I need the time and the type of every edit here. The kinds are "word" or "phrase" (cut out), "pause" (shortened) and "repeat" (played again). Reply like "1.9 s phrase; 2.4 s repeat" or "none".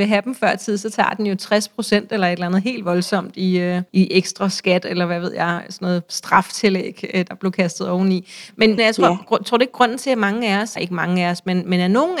3.9 s pause; 8.8 s word; 10.8 s phrase

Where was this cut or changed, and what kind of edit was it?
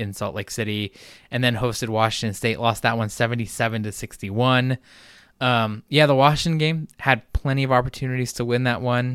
none

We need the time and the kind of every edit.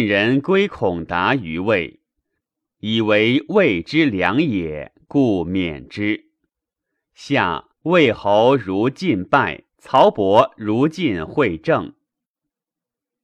7.7 s pause; 9.7 s pause

